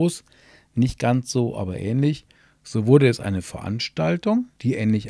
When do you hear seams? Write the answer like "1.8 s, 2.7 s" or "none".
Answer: none